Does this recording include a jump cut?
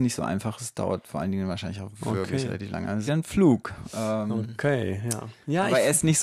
yes; 1 cut; at 3.1 s

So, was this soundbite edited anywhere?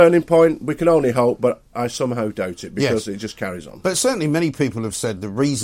yes; 1 cut; at 1.7 s

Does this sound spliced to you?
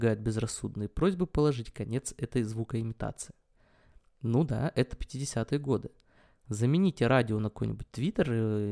no; 0 cuts

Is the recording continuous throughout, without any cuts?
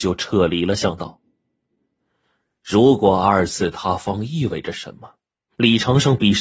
yes; 0 cuts

